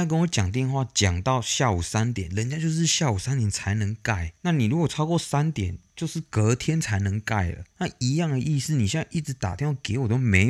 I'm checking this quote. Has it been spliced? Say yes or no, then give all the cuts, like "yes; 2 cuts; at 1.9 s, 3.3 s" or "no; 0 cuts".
yes; 2 cuts; at 4.4 s, 7.7 s